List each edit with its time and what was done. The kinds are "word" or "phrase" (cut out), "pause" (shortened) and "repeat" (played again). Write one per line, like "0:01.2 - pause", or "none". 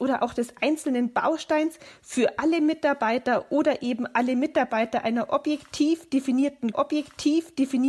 0:06.7 - repeat